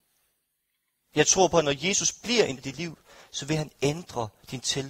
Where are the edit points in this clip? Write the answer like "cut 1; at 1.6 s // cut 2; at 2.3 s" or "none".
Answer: cut 1; at 2.6 s